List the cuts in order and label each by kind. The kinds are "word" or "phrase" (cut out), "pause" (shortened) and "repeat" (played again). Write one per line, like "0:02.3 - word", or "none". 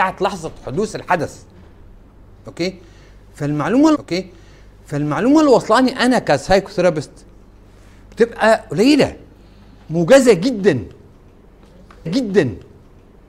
0:03.9 - repeat
0:12.1 - repeat